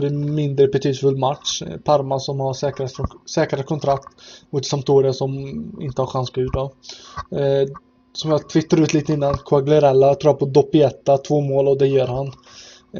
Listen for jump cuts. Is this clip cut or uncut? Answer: cut